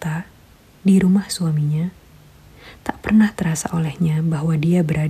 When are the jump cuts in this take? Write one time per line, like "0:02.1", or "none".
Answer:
none